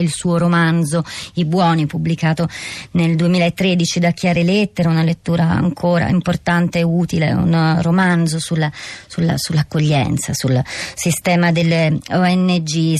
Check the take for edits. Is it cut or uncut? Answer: uncut